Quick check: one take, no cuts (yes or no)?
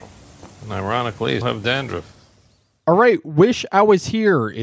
no